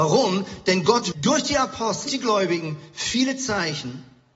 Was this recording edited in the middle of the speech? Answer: yes; 2 cuts; at 1.1 s, 2.1 s

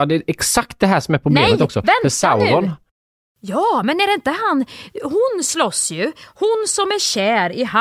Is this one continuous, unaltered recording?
yes; 0 cuts

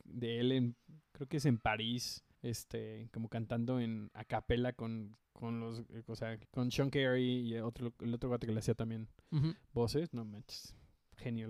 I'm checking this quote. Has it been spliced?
yes; 3 cuts; at 2.3 s, 5.2 s, 6.4 s

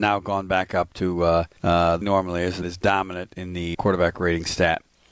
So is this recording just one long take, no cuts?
no; 4 cuts; at 1.6 s, 2.0 s, 2.6 s, 3.7 s

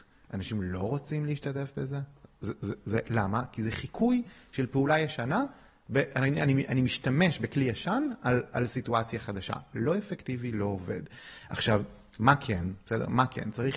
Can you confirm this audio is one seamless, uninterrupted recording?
yes; 0 cuts

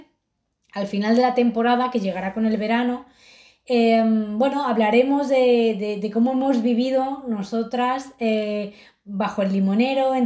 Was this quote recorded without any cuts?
yes; 0 cuts

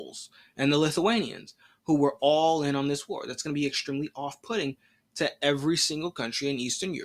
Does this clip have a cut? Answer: no; 0 cuts

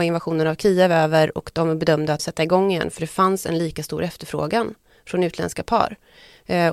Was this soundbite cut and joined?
yes; 1 cut; at 2.2 s

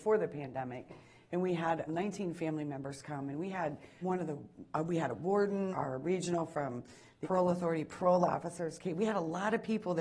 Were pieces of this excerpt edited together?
yes; 4 cuts; at 1.9 s, 4.0 s, 5.7 s, 7.2 s

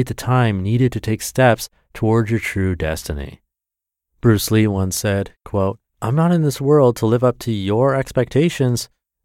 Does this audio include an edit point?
yes; 1 cut; at 5.9 s

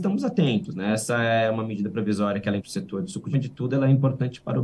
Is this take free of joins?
no; 2 cuts; at 2.6 s, 3.3 s

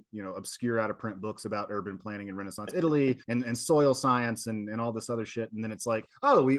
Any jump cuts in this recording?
yes; 1 cut; at 3.2 s

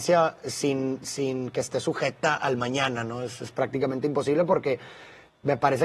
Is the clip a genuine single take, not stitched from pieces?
yes; 0 cuts

